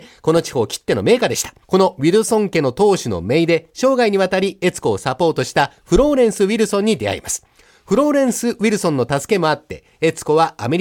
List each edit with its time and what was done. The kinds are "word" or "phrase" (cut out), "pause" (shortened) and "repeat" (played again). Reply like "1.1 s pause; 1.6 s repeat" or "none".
1.6 s pause

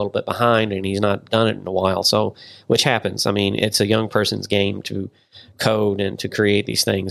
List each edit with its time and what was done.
none

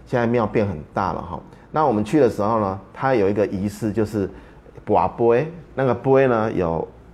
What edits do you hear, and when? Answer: 5.7 s pause

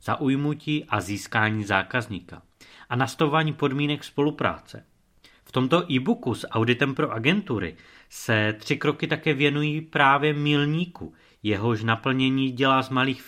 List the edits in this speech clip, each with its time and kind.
none

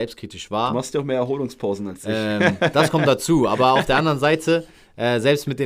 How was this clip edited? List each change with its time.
none

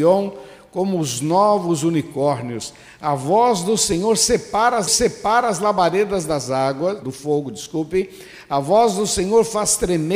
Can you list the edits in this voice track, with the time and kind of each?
4.9 s repeat; 7.0 s word

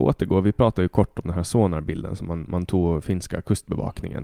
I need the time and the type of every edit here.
none

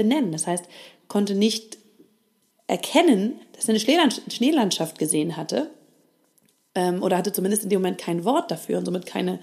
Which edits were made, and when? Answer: 3.4 s pause

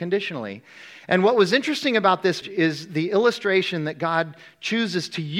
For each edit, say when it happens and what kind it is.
2.4 s word

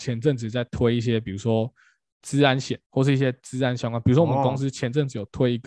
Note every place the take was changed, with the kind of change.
2.8 s pause

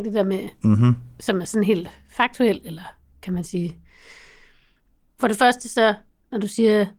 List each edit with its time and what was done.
none

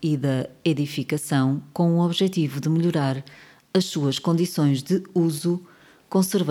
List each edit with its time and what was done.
none

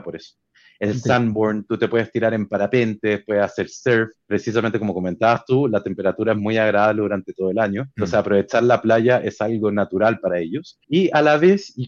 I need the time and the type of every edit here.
4.2 s pause; 7.9 s pause; 10.8 s pause

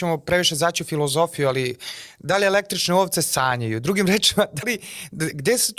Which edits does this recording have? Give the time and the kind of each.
4.6 s word

